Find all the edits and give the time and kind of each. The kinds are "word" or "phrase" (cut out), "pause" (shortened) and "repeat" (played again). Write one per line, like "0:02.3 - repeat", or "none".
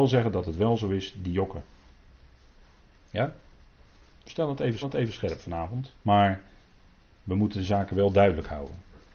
0:02.6 - pause
0:04.8 - repeat
0:06.0 - pause